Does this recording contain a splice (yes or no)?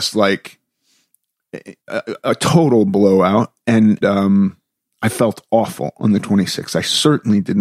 yes